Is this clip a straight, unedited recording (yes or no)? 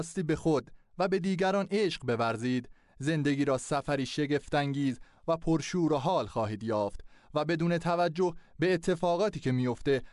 yes